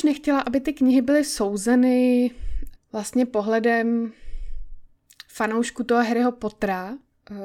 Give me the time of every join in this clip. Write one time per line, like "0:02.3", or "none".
0:02.7

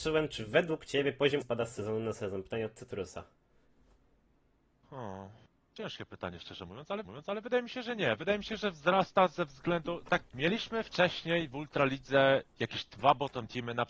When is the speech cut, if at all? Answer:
0:01.4
0:07.0
0:10.2

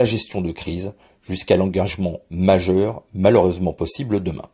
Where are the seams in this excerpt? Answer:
none

